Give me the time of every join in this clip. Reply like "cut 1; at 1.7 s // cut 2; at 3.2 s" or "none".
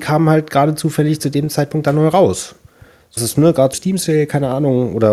cut 1; at 3.2 s // cut 2; at 3.7 s